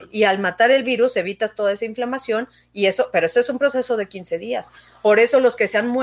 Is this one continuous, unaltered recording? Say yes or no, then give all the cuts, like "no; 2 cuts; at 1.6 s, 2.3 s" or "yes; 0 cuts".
yes; 0 cuts